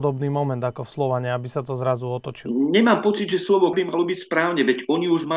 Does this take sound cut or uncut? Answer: cut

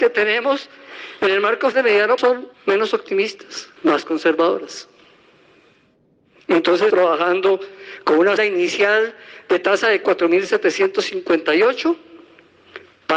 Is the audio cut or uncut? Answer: cut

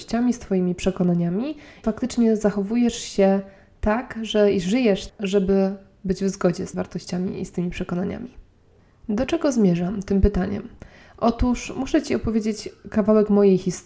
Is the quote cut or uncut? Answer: cut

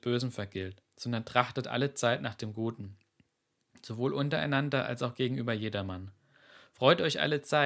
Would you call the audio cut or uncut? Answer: uncut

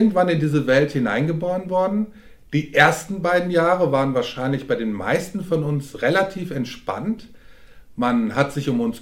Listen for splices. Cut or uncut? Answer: uncut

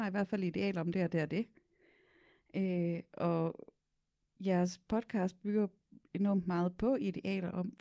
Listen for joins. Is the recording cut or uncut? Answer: uncut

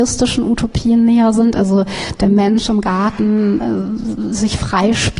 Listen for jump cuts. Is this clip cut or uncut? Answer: uncut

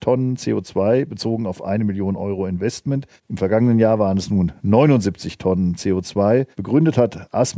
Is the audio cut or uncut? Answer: cut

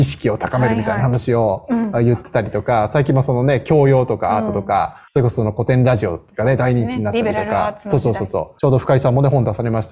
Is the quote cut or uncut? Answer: cut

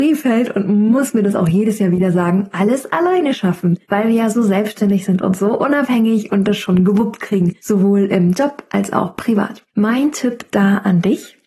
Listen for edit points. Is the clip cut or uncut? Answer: cut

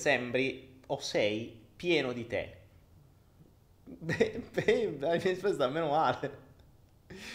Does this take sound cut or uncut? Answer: uncut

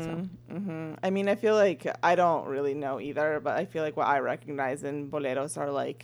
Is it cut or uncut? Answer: uncut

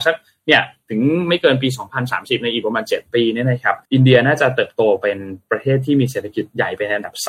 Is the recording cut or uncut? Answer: cut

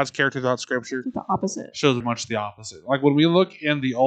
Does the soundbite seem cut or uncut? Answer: cut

